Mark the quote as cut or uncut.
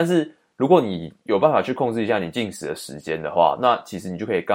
cut